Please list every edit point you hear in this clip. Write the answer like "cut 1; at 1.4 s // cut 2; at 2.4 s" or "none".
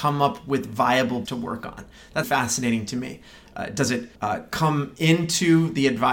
cut 1; at 1.3 s // cut 2; at 2.2 s // cut 3; at 4.2 s